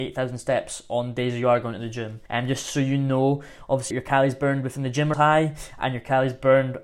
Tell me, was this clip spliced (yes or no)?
yes